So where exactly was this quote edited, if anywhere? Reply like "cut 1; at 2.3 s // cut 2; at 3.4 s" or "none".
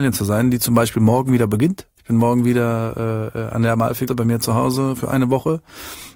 cut 1; at 4.1 s